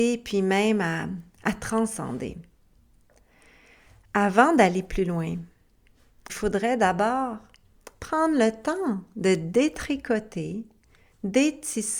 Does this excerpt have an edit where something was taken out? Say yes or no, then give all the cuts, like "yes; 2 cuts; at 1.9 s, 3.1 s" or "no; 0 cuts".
yes; 1 cut; at 6.3 s